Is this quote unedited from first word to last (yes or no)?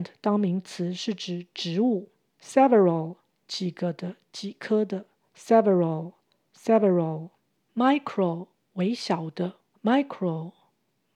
yes